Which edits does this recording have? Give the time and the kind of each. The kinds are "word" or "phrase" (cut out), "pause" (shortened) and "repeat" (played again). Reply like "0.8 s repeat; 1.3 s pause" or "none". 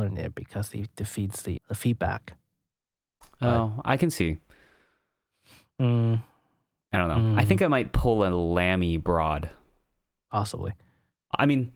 1.6 s word